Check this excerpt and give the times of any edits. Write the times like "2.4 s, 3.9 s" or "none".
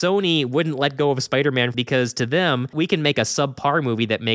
1.7 s, 2.7 s